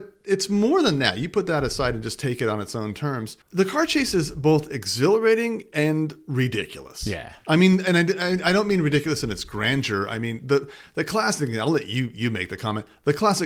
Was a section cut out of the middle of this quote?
yes; 1 cut; at 3.4 s

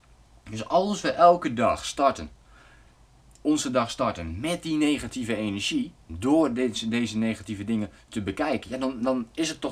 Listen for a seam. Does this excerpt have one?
no; 0 cuts

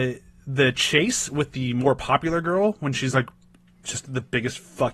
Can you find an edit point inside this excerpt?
no; 0 cuts

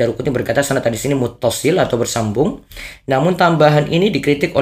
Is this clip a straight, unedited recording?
yes; 0 cuts

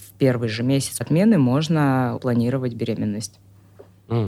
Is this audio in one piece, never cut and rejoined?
no; 2 cuts; at 1.0 s, 2.2 s

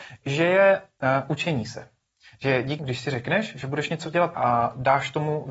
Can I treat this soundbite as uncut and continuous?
no; 2 cuts; at 2.8 s, 4.3 s

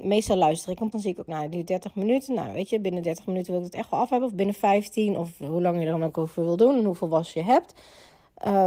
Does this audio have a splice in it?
yes; 2 cuts; at 0.9 s, 1.3 s

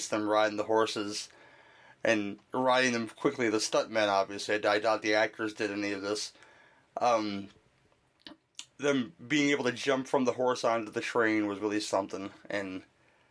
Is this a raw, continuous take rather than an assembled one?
yes; 0 cuts

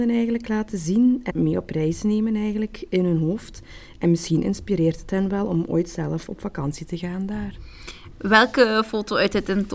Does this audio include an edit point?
yes; 1 cut; at 1.3 s

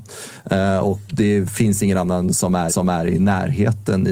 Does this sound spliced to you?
yes; 2 cuts; at 1.1 s, 2.7 s

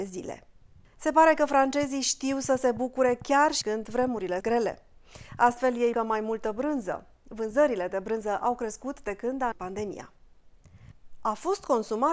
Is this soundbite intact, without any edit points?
no; 4 cuts; at 3.6 s, 4.4 s, 5.9 s, 9.5 s

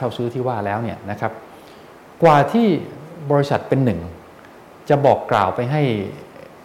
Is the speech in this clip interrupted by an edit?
no; 0 cuts

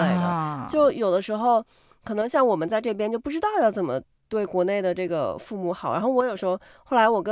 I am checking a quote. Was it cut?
no; 0 cuts

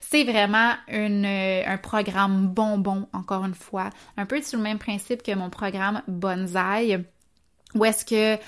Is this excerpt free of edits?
yes; 0 cuts

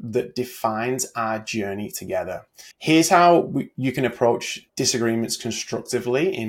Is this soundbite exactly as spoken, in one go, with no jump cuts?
no; 2 cuts; at 2.7 s, 4.7 s

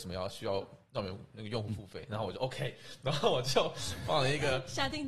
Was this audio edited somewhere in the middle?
no; 0 cuts

